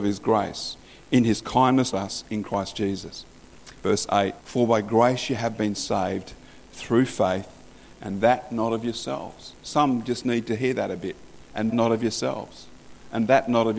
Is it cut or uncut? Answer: cut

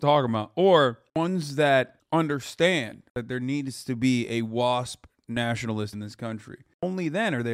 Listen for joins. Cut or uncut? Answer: cut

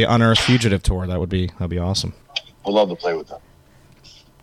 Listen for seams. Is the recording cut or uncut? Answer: cut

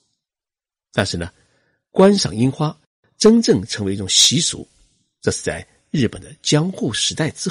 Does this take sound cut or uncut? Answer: uncut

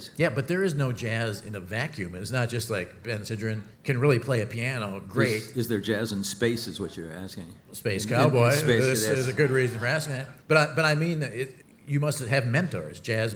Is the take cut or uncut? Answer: cut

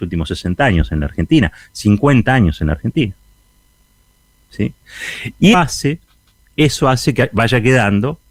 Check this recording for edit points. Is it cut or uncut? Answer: cut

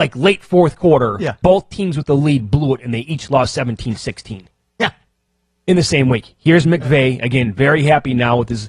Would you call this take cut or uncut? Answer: cut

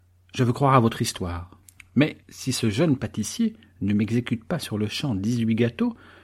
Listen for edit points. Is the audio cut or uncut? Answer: cut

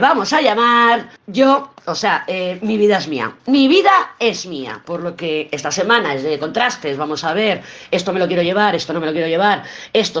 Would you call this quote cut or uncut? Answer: cut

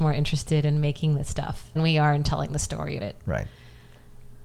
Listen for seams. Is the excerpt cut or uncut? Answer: cut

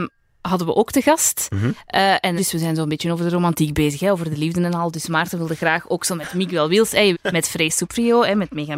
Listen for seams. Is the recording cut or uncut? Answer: cut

